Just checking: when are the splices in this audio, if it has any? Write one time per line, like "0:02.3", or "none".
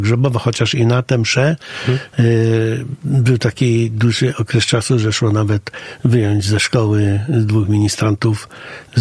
none